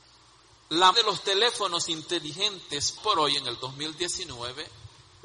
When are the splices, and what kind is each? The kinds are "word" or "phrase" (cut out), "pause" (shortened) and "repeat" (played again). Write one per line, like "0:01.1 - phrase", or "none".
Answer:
0:00.9 - word
0:03.0 - word